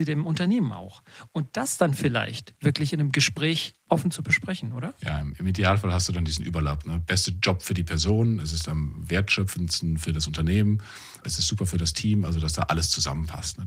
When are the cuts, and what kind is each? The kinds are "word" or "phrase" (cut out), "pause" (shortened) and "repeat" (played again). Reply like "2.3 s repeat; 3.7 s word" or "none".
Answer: none